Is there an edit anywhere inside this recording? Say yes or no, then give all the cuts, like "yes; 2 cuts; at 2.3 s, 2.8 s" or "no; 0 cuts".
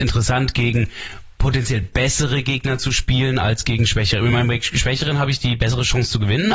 no; 0 cuts